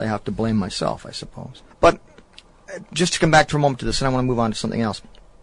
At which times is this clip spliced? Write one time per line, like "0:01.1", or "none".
0:01.7